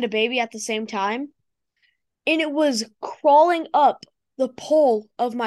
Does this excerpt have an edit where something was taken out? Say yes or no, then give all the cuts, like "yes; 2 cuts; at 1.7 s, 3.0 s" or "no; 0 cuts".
no; 0 cuts